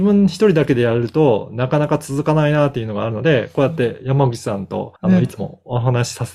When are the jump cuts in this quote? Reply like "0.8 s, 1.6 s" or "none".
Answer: 5.0 s